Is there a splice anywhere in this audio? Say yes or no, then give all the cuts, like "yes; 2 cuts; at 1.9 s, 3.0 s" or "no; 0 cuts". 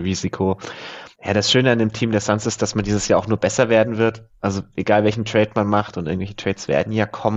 no; 0 cuts